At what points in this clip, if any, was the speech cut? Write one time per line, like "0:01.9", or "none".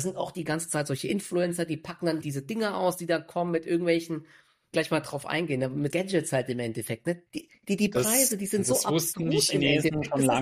0:02.2
0:04.7
0:05.9
0:07.3